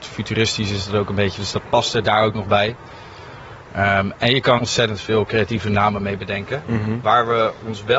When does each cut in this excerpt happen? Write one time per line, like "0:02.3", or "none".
0:04.6